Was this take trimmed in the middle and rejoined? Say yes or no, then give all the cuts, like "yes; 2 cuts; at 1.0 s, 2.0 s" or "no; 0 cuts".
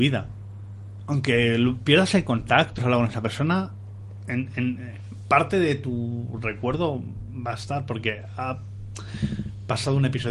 yes; 1 cut; at 2.8 s